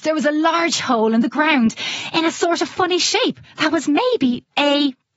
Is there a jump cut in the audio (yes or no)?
no